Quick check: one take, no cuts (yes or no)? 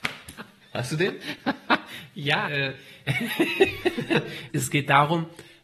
no